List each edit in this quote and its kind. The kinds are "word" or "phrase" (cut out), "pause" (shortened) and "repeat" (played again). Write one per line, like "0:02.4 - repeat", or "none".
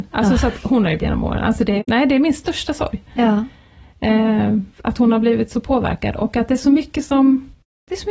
0:01.0 - phrase
0:01.8 - word
0:04.7 - pause